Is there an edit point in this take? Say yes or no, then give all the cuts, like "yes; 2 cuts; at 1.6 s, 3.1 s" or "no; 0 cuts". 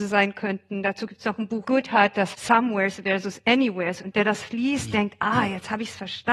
yes; 3 cuts; at 1.6 s, 2.3 s, 4.1 s